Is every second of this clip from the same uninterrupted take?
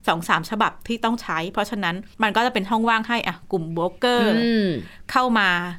no; 1 cut; at 2.1 s

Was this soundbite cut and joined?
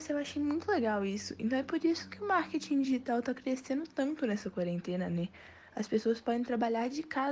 no; 0 cuts

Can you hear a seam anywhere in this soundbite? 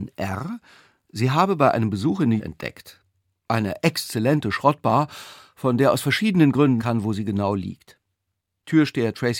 yes; 2 cuts; at 2.4 s, 6.8 s

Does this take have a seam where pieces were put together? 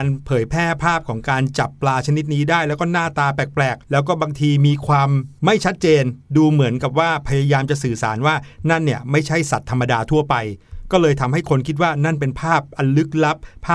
yes; 1 cut; at 3.8 s

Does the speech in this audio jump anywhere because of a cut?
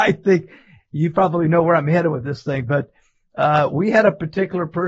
no; 0 cuts

